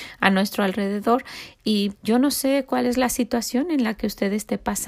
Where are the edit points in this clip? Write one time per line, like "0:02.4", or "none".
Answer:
0:01.9